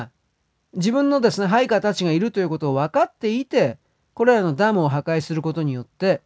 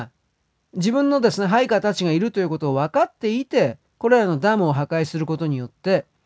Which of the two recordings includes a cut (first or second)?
second